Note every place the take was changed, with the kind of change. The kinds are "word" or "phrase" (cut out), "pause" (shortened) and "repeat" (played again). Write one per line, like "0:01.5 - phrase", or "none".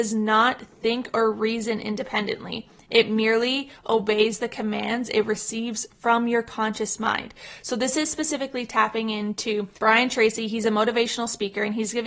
0:09.8 - pause